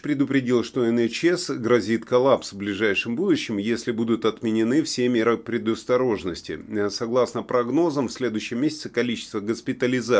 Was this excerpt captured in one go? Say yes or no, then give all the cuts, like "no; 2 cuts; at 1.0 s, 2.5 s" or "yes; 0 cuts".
yes; 0 cuts